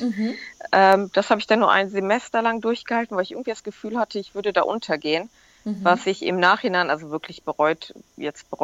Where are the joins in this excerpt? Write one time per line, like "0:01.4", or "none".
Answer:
none